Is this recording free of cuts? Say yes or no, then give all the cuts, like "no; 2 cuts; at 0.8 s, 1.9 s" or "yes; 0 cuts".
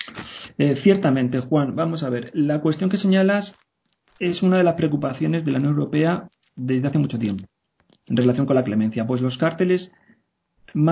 yes; 0 cuts